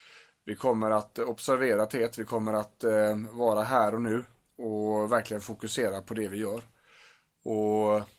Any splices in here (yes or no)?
no